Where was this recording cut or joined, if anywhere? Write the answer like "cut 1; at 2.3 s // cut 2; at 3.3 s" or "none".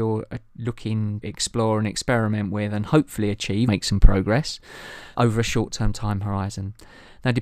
cut 1; at 1.2 s // cut 2; at 3.7 s // cut 3; at 5.1 s